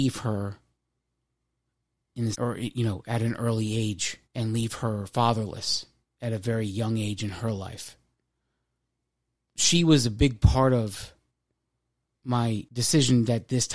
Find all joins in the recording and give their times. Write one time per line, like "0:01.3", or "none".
0:02.3
0:04.2
0:06.0

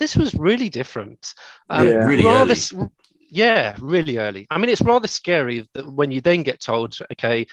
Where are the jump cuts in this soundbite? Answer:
none

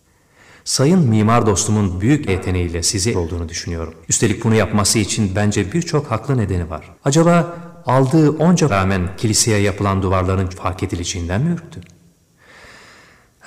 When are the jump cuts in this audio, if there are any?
0:02.3
0:03.1
0:04.0
0:07.0
0:08.7
0:10.5

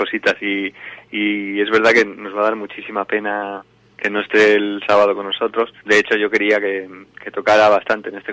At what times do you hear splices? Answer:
0:05.8

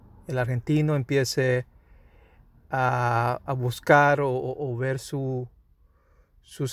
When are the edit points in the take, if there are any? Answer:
none

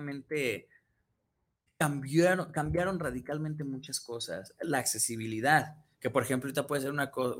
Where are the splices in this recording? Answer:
0:05.9

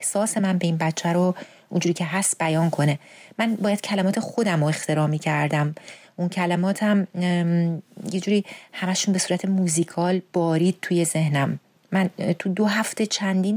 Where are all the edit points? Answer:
none

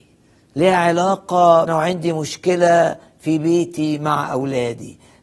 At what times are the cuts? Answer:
0:01.7

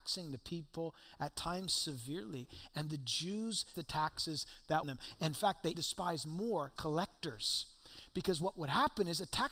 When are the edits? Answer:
0:03.7
0:04.8
0:05.7
0:06.8

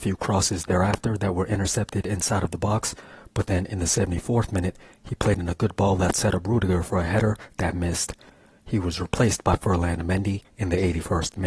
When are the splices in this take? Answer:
none

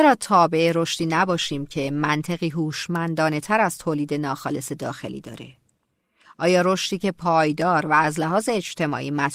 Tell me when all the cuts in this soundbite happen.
none

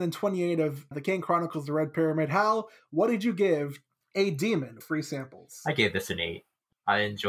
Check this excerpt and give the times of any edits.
0:00.9
0:04.0
0:04.8

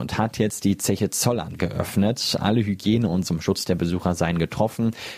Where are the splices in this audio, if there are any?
0:01.6
0:03.2

